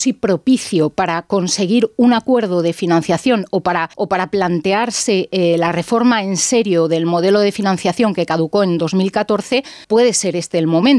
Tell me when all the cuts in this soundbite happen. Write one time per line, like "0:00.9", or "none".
0:03.9
0:09.8